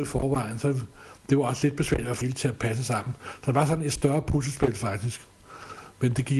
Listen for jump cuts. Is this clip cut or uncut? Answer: cut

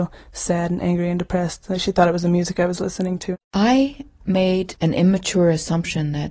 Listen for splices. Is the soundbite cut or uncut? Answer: cut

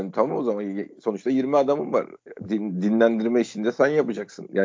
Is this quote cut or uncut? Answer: uncut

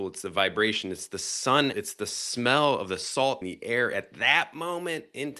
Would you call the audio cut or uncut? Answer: cut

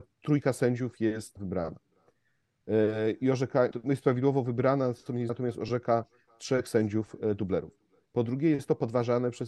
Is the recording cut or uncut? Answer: cut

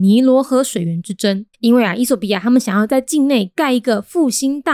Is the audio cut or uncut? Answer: cut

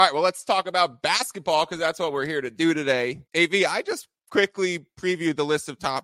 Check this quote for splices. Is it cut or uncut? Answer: cut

